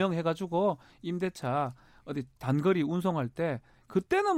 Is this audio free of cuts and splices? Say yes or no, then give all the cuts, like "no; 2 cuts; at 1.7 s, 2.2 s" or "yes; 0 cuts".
yes; 0 cuts